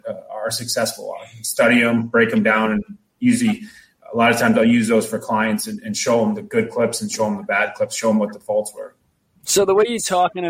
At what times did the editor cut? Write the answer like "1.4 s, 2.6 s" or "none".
none